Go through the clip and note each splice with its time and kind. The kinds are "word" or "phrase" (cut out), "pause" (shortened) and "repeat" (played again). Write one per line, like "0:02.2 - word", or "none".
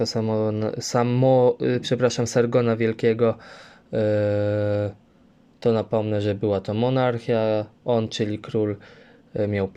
none